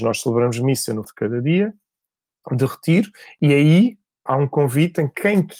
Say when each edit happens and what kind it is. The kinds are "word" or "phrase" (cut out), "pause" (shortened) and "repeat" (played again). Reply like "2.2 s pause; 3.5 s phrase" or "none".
1.0 s word; 4.3 s word

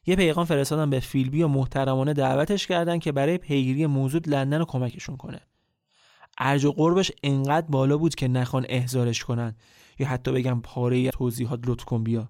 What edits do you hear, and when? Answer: 4.2 s word; 10.6 s word; 11.1 s word

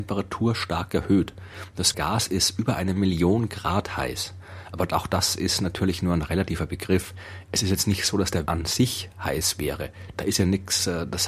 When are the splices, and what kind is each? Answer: 1.9 s word; 8.5 s word

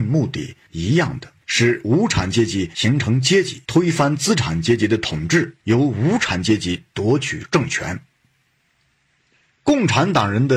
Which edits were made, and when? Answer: 1.4 s pause; 3.6 s pause; 5.6 s pause

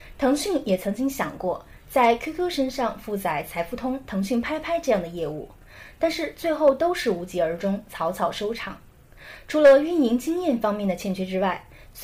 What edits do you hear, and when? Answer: none

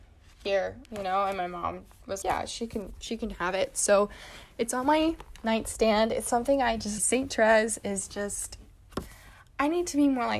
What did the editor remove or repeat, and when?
2.2 s word; 7.0 s phrase

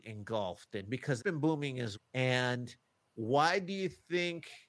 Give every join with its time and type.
1.2 s word; 1.9 s word

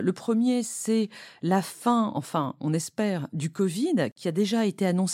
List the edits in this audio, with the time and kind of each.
none

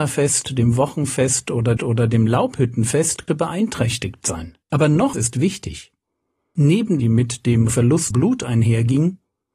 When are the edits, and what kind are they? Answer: 1.8 s repeat; 3.3 s word; 4.6 s pause; 5.1 s word; 7.0 s phrase; 7.7 s word; 8.1 s word

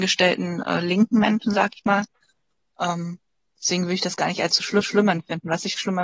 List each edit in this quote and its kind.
4.8 s repeat

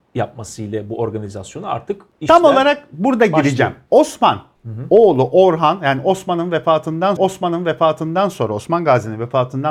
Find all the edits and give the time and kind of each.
7.2 s repeat

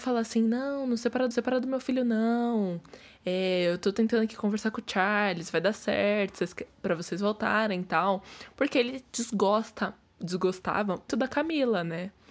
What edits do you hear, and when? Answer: 1.3 s repeat; 11.1 s word

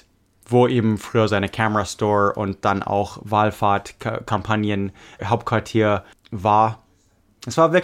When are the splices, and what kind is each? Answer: 5.2 s word

